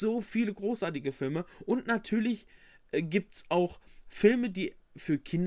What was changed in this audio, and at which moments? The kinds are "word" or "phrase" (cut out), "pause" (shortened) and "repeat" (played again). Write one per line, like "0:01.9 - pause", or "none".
none